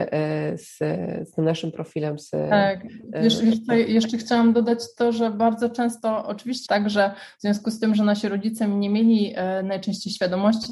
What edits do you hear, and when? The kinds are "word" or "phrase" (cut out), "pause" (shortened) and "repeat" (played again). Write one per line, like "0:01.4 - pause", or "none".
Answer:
0:06.7 - word

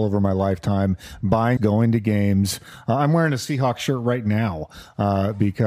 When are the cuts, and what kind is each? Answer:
0:01.6 - word

